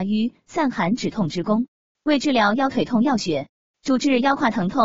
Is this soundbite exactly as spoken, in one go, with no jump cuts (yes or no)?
yes